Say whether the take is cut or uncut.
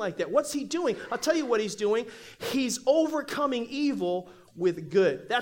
uncut